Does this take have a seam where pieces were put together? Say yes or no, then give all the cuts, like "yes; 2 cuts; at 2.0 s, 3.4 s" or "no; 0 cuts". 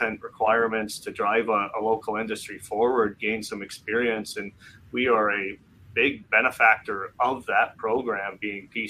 no; 0 cuts